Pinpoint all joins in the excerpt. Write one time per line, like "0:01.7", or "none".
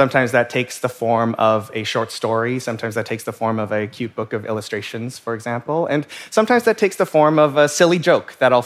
none